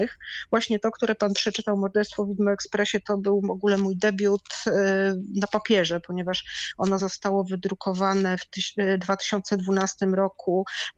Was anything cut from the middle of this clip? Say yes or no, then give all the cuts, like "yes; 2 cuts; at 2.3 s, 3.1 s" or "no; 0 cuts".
yes; 1 cut; at 7.0 s